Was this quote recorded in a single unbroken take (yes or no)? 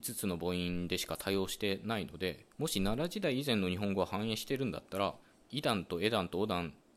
no